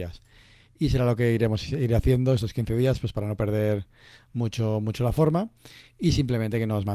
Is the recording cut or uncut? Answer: uncut